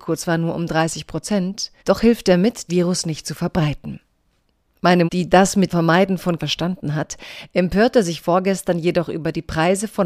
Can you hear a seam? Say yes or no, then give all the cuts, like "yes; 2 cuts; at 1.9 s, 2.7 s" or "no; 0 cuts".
yes; 5 cuts; at 1.8 s, 2.7 s, 5.1 s, 5.7 s, 6.4 s